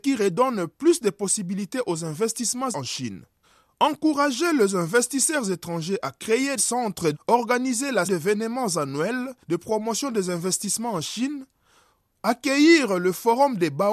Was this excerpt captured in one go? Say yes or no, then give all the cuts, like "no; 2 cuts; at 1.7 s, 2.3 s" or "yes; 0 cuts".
no; 6 cuts; at 2.7 s, 3.4 s, 6.6 s, 7.1 s, 8.0 s, 9.4 s